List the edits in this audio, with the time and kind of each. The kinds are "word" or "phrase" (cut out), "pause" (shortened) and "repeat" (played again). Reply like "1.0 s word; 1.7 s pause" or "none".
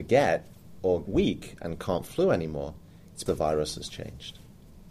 1.0 s word; 2.1 s word; 3.3 s word